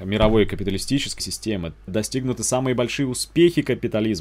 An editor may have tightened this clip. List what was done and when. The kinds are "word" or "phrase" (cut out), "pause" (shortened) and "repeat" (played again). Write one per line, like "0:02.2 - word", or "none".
0:01.2 - word
0:01.9 - phrase